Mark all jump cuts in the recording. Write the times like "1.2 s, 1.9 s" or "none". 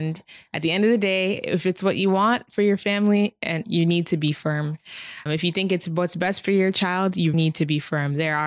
3.6 s, 5.3 s, 7.3 s